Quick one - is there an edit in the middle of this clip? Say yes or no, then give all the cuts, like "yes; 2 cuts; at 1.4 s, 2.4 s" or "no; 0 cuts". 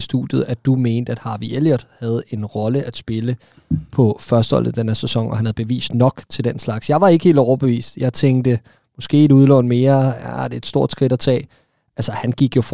no; 0 cuts